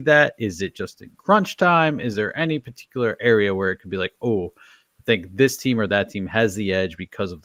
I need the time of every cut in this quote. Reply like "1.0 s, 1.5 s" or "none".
none